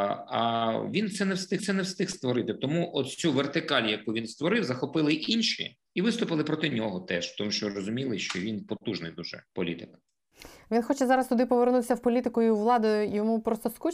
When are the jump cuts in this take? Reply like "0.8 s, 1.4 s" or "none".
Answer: 1.6 s, 5.9 s, 9.5 s